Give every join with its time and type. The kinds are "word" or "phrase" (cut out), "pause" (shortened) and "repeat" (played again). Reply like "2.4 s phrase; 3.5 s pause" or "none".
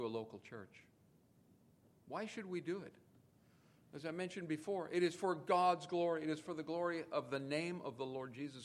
none

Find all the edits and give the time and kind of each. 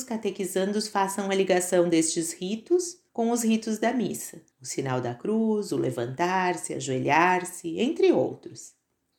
3.1 s pause; 4.5 s pause

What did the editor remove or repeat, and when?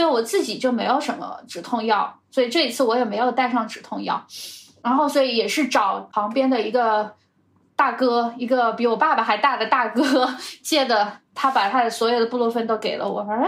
none

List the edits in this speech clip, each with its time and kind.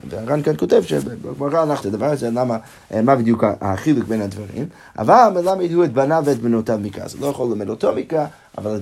1.8 s word

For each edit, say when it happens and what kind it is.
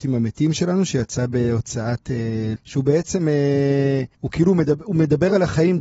2.6 s word; 4.1 s pause

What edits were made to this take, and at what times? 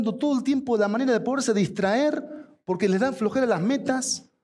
none

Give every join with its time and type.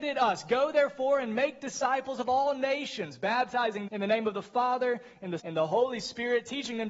3.9 s word; 5.4 s word

